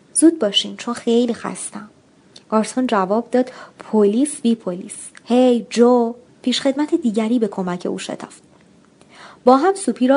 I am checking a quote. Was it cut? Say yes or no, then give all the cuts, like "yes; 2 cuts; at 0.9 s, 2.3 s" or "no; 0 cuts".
yes; 2 cuts; at 2.4 s, 6.2 s